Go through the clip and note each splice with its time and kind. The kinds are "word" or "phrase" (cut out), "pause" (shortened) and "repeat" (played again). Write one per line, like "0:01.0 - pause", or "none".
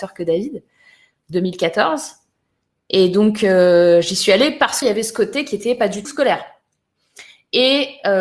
0:04.8 - word
0:06.0 - word